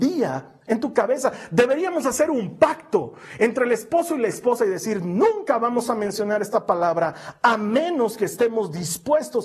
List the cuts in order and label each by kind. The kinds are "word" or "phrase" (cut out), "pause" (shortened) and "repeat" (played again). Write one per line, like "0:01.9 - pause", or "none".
none